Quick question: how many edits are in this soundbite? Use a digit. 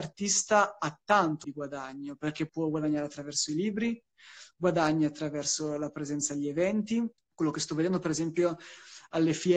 3